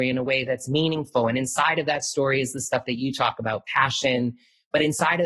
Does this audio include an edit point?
no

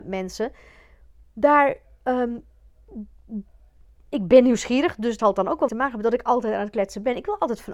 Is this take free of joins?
no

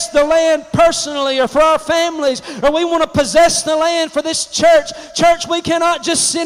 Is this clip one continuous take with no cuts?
yes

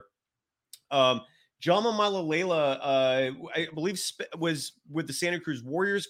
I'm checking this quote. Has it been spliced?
no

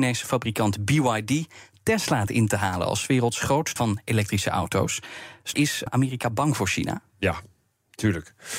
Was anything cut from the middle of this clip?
yes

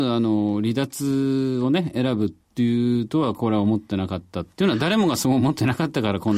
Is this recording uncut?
no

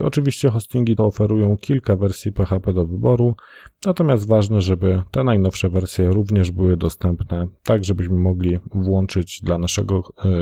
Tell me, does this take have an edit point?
yes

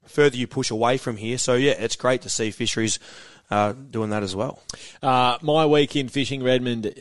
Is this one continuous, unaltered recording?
yes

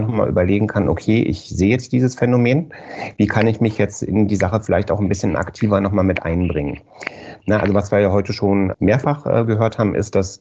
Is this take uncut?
yes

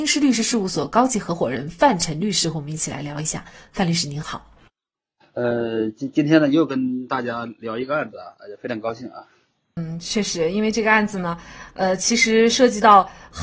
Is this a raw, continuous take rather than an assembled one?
yes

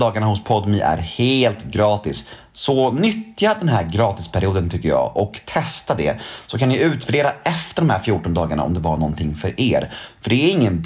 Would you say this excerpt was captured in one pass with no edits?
yes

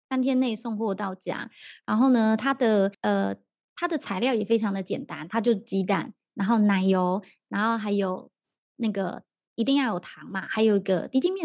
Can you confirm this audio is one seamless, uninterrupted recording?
no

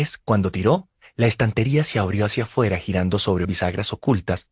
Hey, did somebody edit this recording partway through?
yes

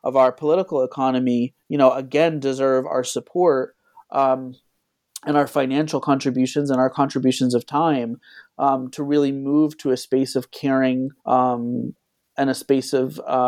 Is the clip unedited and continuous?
no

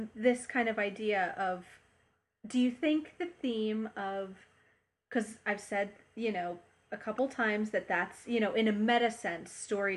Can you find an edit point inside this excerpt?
no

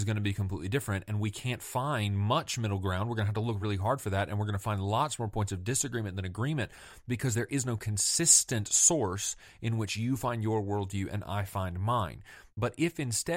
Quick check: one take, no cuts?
yes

